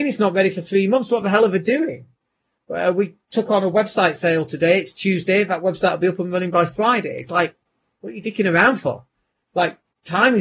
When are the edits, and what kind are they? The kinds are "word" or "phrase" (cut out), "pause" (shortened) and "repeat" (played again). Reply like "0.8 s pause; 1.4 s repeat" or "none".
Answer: none